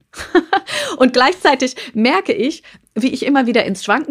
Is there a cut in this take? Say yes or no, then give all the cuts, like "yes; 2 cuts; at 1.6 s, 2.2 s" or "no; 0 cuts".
no; 0 cuts